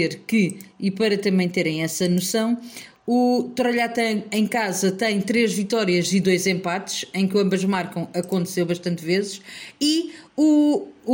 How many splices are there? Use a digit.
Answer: 0